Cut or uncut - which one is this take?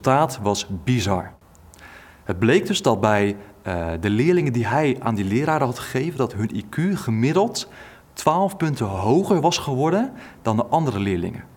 uncut